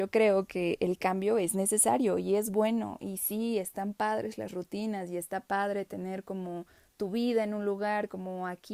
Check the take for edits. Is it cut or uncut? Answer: uncut